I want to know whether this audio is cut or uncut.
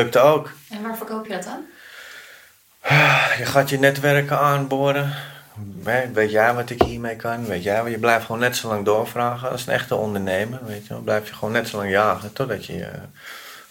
uncut